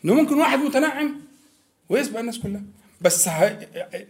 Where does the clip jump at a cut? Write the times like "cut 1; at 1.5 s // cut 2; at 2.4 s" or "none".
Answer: none